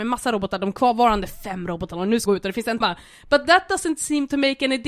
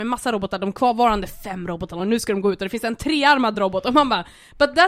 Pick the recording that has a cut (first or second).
first